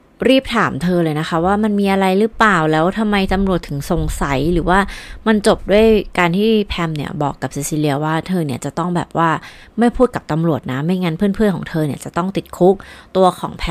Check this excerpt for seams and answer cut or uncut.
uncut